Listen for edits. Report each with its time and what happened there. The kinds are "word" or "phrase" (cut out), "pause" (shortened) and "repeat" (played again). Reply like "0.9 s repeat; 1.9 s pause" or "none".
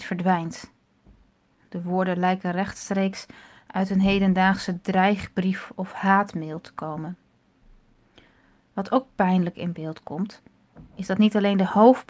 none